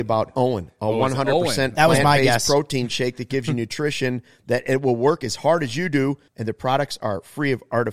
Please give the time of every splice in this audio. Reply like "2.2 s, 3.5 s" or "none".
6.3 s